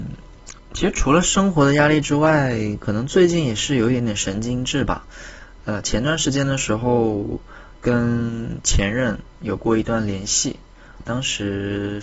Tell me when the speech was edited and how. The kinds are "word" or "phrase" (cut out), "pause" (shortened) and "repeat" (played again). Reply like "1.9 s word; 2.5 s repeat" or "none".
11.0 s word